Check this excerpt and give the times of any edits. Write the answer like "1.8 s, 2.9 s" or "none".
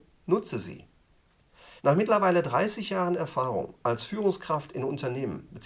1.8 s